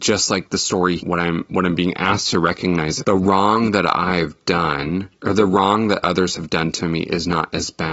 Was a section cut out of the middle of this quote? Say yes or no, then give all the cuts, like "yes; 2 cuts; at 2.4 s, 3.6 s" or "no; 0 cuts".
yes; 3 cuts; at 1.0 s, 3.0 s, 5.1 s